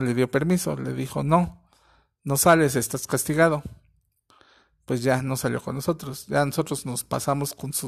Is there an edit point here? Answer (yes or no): no